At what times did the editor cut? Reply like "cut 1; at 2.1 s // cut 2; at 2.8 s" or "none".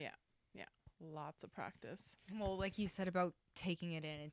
cut 1; at 0.9 s